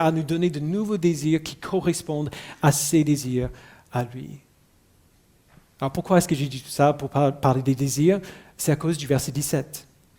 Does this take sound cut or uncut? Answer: uncut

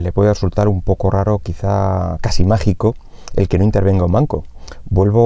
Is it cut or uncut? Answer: uncut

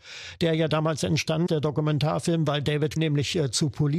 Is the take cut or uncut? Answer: cut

